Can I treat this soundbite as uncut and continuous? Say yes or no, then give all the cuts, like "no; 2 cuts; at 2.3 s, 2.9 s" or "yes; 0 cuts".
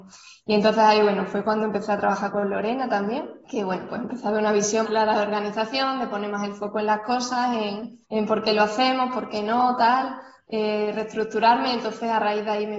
no; 3 cuts; at 3.4 s, 4.8 s, 8.0 s